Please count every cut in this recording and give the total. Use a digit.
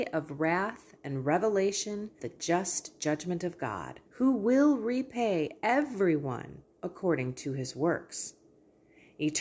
3